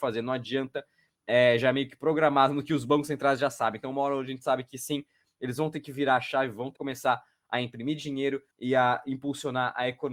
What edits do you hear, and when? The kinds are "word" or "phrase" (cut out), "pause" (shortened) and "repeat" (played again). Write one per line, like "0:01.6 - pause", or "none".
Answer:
0:06.8 - word
0:08.5 - pause